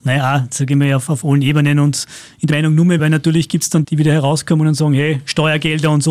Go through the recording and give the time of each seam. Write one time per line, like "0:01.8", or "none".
0:02.5
0:03.0
0:03.8